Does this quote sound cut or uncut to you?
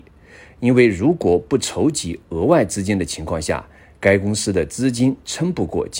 uncut